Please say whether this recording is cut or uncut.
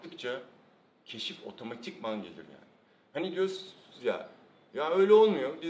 uncut